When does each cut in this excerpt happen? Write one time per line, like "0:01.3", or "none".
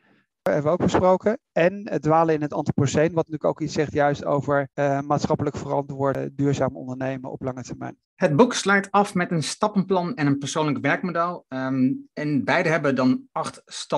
0:04.7
0:08.0